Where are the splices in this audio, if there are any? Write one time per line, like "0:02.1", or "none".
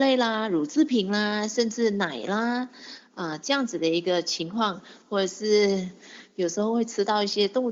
none